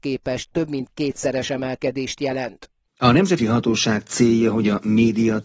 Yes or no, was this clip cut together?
yes